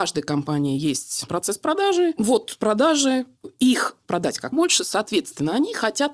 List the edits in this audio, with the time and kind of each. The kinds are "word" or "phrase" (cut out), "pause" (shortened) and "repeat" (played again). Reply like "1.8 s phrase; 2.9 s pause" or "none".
1.3 s word; 4.0 s phrase; 4.5 s word